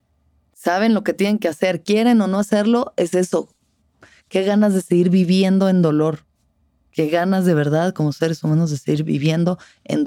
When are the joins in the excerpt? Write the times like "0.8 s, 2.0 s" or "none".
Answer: none